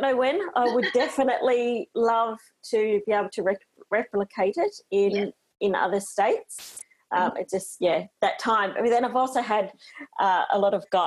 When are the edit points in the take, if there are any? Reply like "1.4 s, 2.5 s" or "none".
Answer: none